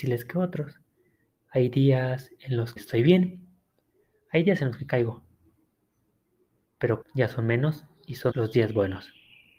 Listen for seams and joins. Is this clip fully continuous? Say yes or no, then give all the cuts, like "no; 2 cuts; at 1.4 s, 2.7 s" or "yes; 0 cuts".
no; 3 cuts; at 2.8 s, 7.0 s, 8.3 s